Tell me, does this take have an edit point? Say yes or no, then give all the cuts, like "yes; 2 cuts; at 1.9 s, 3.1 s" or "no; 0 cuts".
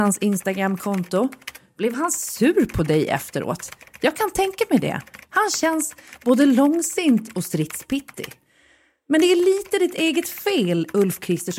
no; 0 cuts